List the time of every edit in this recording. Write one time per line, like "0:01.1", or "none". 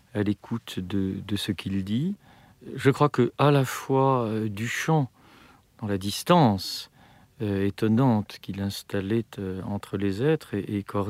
none